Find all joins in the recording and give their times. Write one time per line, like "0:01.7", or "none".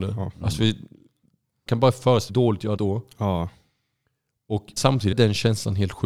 0:01.7
0:02.3
0:02.8
0:04.8
0:05.1